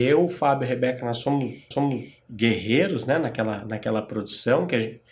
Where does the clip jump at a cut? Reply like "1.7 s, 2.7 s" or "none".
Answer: 1.7 s